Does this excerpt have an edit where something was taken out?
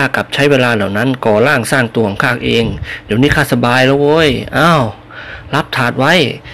no; 0 cuts

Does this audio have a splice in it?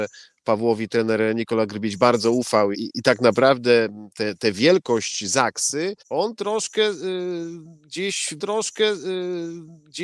yes; 3 cuts; at 2.7 s, 6.0 s, 8.4 s

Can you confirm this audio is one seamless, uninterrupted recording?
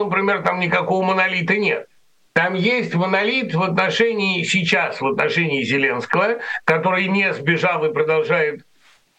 yes; 0 cuts

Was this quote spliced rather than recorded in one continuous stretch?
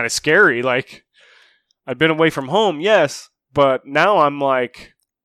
no; 0 cuts

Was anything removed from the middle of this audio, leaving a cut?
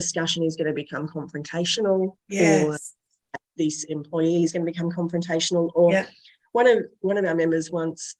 no; 0 cuts

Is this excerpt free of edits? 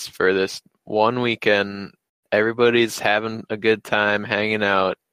yes; 0 cuts

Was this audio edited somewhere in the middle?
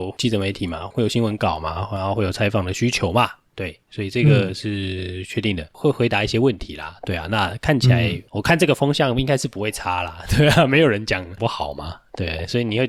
yes; 1 cut; at 8.3 s

